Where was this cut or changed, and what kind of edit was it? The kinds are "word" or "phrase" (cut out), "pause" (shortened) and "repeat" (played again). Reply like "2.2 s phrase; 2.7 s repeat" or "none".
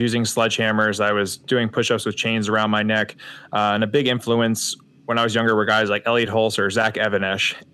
none